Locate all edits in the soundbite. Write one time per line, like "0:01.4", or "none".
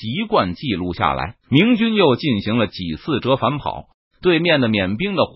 0:01.4